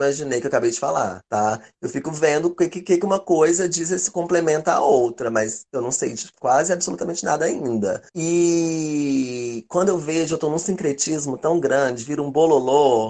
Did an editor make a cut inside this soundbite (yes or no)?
yes